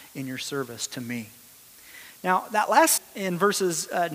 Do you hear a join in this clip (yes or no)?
yes